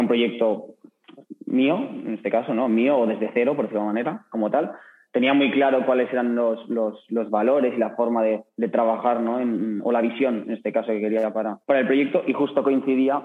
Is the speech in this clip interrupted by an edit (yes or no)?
yes